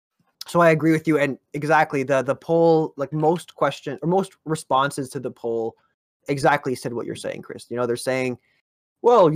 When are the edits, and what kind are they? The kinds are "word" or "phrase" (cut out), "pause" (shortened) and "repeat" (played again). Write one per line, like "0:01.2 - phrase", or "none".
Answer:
none